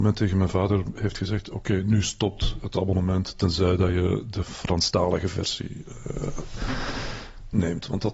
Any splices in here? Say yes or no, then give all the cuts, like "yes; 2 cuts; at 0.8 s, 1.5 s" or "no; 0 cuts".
no; 0 cuts